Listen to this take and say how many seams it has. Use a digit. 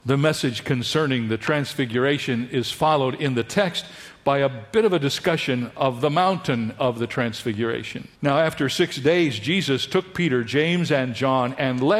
1